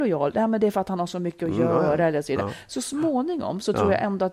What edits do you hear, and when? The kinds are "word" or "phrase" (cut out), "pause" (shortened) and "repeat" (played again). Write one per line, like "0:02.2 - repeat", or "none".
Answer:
none